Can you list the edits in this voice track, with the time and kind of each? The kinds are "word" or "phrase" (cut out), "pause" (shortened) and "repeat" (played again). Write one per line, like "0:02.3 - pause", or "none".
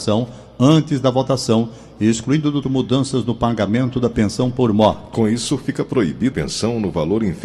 0:02.6 - word
0:06.3 - phrase